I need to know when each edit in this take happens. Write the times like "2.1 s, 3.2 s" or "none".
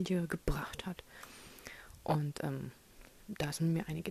3.2 s